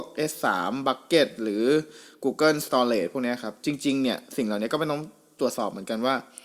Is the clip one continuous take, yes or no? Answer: yes